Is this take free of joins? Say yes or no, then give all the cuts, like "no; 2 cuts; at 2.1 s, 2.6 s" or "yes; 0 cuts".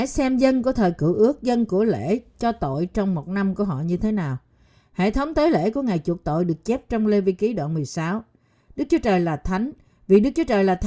yes; 0 cuts